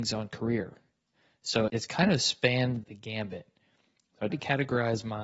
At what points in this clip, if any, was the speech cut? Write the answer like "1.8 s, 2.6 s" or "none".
1.7 s, 2.8 s, 4.3 s